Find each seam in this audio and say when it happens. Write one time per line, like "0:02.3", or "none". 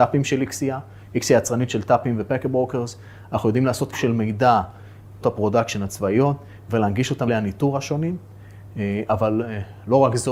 0:03.9
0:05.2
0:07.3